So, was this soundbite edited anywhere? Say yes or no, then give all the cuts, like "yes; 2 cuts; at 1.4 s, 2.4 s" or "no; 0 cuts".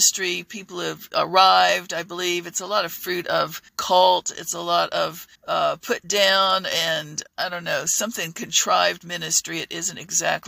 yes; 3 cuts; at 3.7 s, 5.4 s, 7.3 s